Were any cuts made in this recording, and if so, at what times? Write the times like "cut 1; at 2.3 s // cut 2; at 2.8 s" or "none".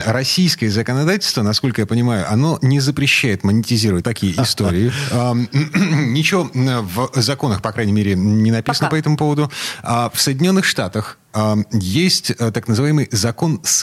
cut 1; at 4.0 s

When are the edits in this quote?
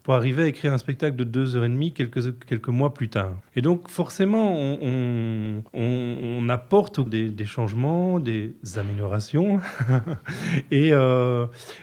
cut 1; at 3.5 s // cut 2; at 5.7 s // cut 3; at 7.1 s

